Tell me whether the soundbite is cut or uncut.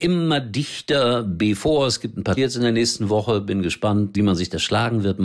cut